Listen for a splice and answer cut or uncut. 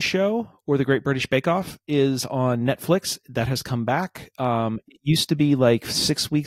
uncut